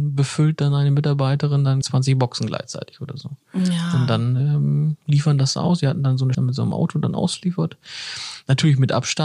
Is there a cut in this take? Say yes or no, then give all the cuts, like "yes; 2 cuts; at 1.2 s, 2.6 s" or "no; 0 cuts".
yes; 2 cuts; at 1.8 s, 6.3 s